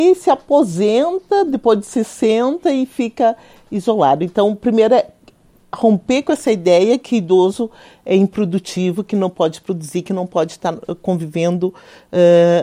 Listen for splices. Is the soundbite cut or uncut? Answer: uncut